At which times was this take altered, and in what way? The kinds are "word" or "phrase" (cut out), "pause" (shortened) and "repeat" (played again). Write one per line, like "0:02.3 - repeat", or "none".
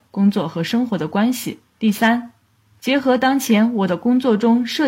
0:01.7 - pause